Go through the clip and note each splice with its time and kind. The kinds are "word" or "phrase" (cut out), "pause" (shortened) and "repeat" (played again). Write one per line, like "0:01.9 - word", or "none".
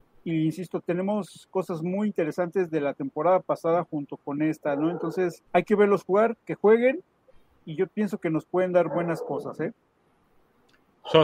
0:05.5 - pause